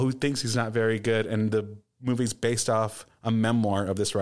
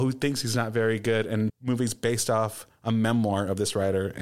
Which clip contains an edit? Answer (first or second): second